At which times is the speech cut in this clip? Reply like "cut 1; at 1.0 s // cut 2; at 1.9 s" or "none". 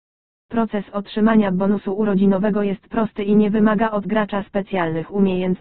none